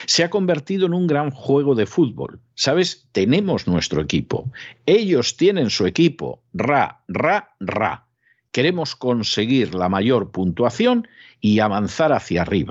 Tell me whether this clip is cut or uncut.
uncut